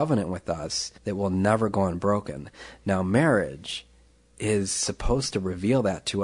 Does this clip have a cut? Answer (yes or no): yes